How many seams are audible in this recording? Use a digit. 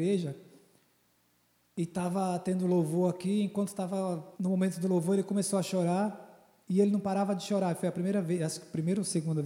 2